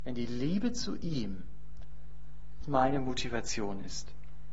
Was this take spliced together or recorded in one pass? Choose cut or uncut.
cut